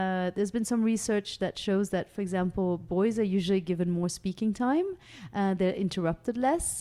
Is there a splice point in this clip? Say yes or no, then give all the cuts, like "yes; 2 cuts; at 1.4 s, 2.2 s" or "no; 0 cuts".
no; 0 cuts